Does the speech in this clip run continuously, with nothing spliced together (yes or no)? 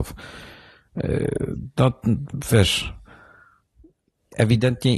yes